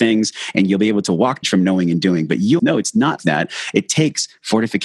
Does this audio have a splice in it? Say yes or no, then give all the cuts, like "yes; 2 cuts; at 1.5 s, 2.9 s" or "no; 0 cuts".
yes; 3 cuts; at 1.4 s, 2.6 s, 3.2 s